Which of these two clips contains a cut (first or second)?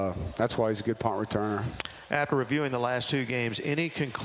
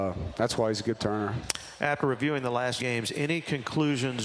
second